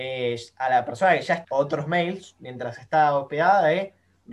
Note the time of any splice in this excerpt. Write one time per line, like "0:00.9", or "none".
0:01.4